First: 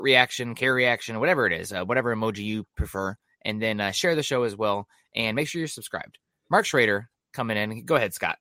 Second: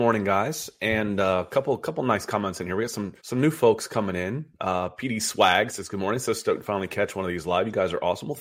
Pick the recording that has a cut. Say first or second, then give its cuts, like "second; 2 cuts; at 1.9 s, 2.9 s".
second; 1 cut; at 3.2 s